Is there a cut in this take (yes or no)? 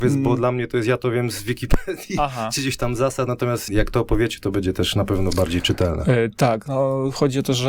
yes